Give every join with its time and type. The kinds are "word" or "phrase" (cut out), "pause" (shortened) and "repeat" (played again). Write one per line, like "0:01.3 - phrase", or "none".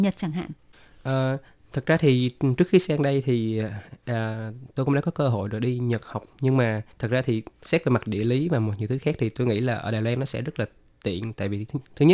0:06.3 - pause
0:06.9 - pause
0:07.5 - pause